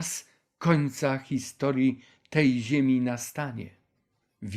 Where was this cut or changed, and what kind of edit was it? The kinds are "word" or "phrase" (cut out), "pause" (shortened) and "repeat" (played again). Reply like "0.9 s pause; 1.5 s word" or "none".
none